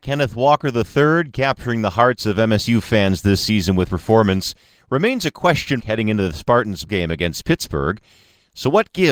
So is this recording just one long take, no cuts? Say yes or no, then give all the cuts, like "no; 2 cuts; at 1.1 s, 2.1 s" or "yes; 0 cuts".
no; 3 cuts; at 3.9 s, 5.8 s, 6.9 s